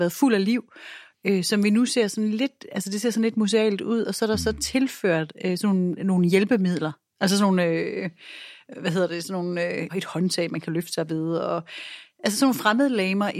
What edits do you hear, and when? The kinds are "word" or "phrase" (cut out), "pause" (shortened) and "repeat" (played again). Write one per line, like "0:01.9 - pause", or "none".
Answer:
0:09.9 - word